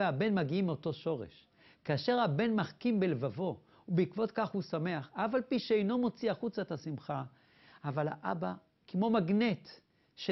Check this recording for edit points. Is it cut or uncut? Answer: uncut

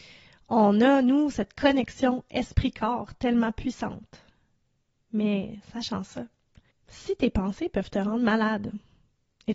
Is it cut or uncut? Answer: uncut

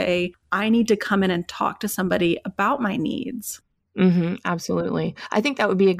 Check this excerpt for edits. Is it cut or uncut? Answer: uncut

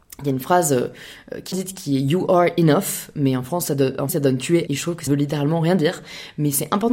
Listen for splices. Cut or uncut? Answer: cut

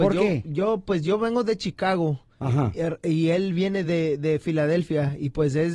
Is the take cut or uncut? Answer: uncut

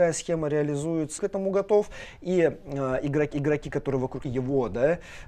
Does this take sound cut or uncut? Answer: cut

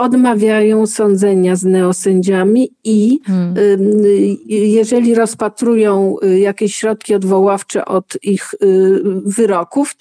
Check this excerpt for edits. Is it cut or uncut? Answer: uncut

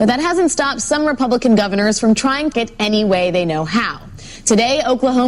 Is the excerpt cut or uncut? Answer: cut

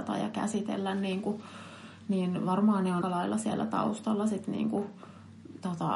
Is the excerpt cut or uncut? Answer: cut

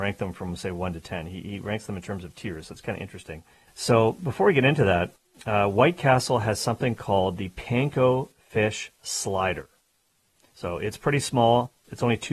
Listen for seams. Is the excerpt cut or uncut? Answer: cut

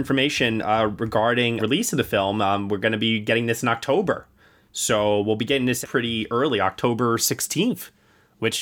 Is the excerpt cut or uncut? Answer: cut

